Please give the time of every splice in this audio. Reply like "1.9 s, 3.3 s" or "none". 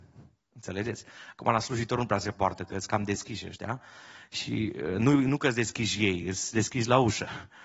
none